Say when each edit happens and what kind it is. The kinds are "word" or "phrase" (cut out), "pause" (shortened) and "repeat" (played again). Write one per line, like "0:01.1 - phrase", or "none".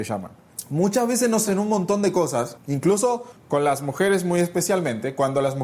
0:01.5 - word